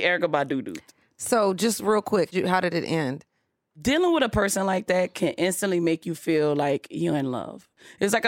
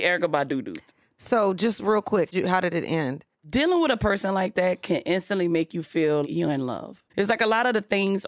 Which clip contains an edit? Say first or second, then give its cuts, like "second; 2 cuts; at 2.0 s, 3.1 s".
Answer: second; 3 cuts; at 3.3 s, 6.2 s, 7.1 s